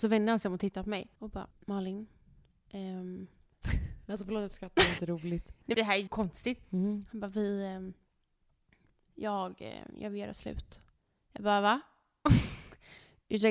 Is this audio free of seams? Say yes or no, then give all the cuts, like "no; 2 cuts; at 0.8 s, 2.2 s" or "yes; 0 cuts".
no; 6 cuts; at 1.2 s, 1.5 s, 5.0 s, 5.7 s, 6.1 s, 11.0 s